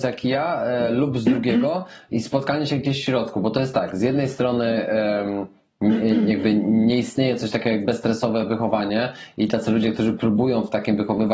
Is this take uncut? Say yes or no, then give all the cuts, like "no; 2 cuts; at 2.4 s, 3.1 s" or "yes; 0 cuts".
yes; 0 cuts